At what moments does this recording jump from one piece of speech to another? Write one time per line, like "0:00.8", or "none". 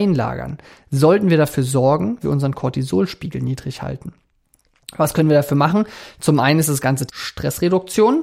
0:02.2
0:07.1